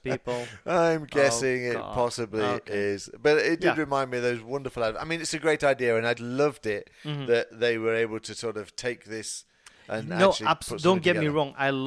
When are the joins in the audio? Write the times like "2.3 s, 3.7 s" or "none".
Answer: 6.2 s